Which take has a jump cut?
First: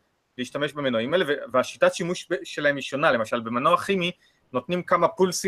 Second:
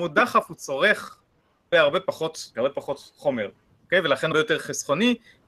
second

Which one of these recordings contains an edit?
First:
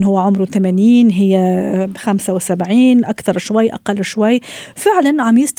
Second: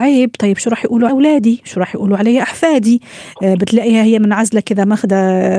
second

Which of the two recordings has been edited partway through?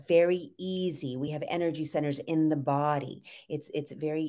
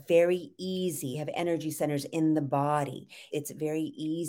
second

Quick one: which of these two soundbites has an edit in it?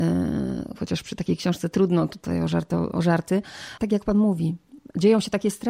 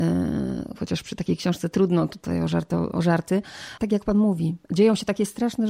second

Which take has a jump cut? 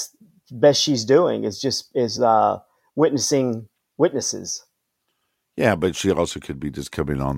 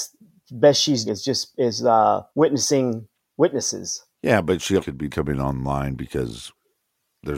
second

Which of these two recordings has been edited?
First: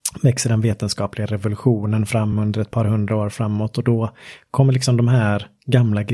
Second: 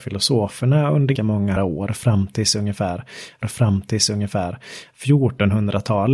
second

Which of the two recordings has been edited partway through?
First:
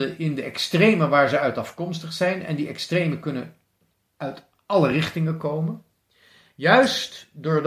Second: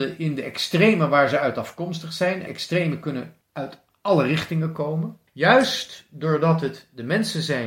second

